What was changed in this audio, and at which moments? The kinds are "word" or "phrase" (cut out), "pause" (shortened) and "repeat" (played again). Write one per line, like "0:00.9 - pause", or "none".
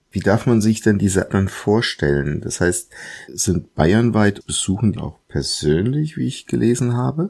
0:01.3 - word
0:03.3 - word
0:04.4 - word
0:05.0 - word